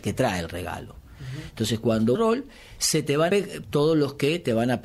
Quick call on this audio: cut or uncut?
cut